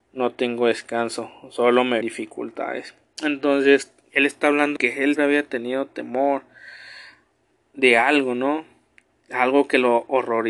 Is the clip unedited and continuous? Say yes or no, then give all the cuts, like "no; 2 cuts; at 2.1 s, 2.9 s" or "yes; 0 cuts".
no; 3 cuts; at 2.0 s, 4.8 s, 5.2 s